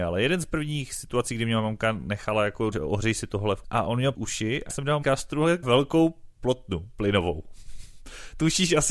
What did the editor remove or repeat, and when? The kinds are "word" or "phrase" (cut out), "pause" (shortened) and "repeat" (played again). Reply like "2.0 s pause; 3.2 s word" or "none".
2.7 s word; 3.6 s word; 4.1 s word; 4.7 s word; 5.0 s word; 5.6 s word